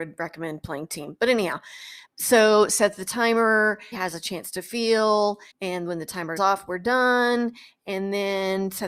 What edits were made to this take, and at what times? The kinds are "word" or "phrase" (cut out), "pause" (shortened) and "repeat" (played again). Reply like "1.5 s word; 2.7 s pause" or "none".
2.0 s pause; 3.9 s word; 5.5 s pause; 6.4 s word